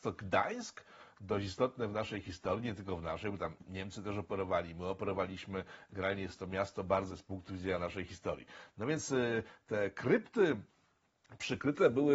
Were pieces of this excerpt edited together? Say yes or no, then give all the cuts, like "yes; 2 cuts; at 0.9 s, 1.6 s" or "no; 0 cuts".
yes; 1 cut; at 7.1 s